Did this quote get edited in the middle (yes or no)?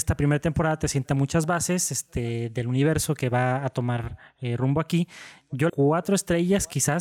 yes